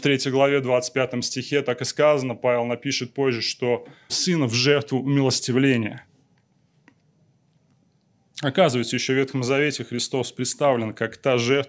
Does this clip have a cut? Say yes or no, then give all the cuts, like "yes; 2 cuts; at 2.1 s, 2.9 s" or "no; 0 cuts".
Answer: yes; 1 cut; at 4.1 s